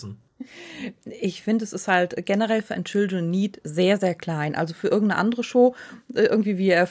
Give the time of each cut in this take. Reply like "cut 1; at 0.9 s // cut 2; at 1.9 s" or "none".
none